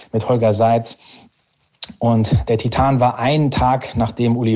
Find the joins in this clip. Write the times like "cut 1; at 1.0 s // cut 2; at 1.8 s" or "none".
none